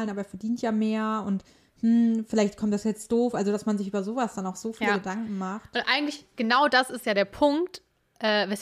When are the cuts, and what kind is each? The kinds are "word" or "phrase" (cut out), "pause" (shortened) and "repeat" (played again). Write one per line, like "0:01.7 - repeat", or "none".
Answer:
none

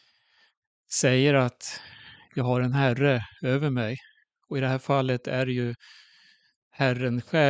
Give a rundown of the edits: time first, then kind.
none

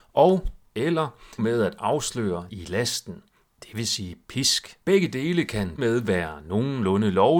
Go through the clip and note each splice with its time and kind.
0:01.4 - phrase
0:02.5 - word
0:04.8 - pause
0:05.8 - word

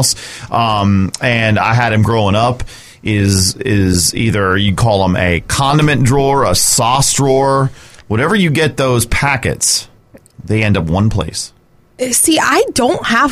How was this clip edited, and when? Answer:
none

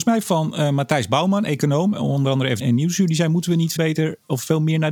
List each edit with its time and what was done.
0:02.6 - word
0:03.8 - word

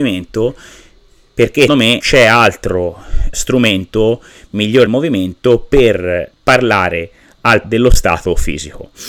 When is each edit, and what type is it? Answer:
0:01.7 - word
0:02.0 - word
0:03.3 - word
0:04.9 - word
0:06.3 - word
0:07.6 - word

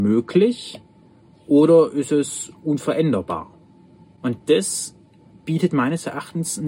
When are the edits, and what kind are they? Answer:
none

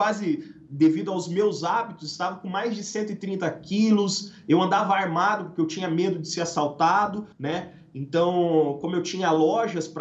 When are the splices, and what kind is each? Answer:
0:07.3 - pause

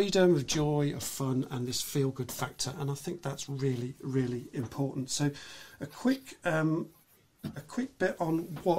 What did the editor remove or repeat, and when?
none

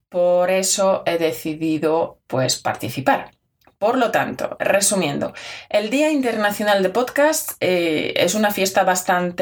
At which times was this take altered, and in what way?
none

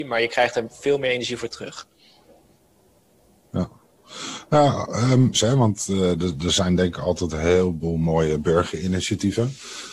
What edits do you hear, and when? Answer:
0:05.3 - word

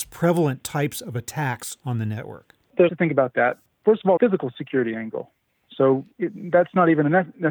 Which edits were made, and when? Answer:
0:02.9 - phrase
0:04.2 - phrase
0:06.1 - pause

